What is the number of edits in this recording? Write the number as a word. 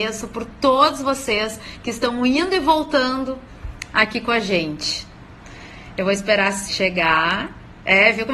one